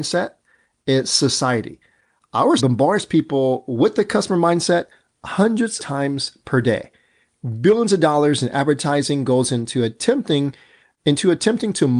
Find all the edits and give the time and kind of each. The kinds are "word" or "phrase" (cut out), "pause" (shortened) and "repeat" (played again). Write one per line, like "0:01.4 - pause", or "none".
0:02.6 - word
0:05.8 - word